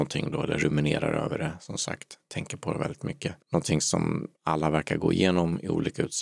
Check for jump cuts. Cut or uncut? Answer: cut